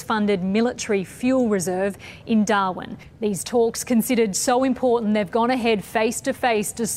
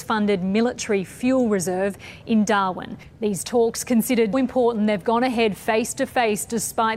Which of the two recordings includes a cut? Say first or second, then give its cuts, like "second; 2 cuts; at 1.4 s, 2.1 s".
second; 1 cut; at 4.3 s